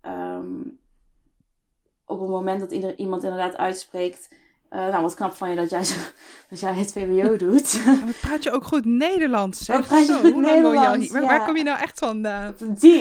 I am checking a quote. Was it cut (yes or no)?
no